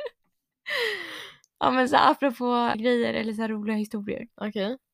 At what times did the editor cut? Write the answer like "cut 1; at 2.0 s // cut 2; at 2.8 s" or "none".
cut 1; at 2.7 s